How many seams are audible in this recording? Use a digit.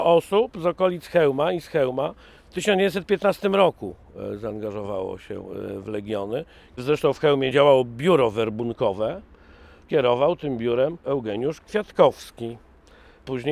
0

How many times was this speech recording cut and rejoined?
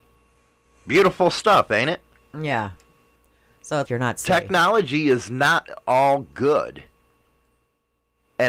1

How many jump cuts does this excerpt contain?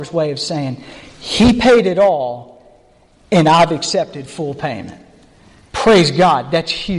0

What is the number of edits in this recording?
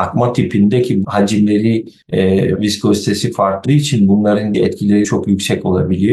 5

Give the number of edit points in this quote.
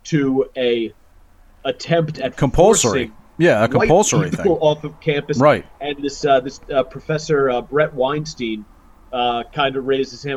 0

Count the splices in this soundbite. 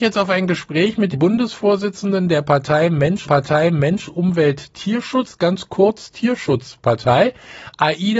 2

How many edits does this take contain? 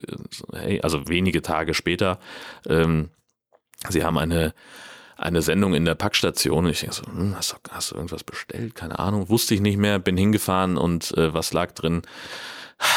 0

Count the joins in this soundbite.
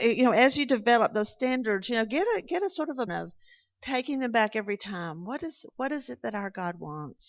1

